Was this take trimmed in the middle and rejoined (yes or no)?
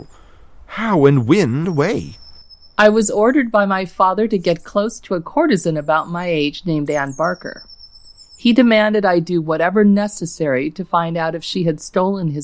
yes